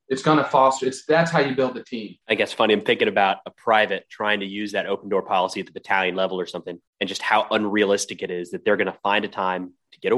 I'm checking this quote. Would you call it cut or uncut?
cut